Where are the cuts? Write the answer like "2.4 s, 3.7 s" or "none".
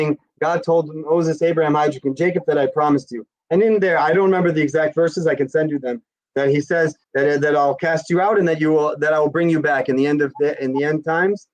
7.0 s